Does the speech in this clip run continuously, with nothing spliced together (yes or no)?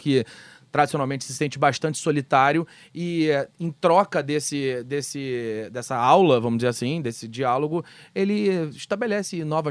yes